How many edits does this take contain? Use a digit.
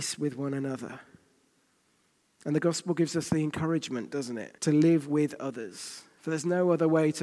1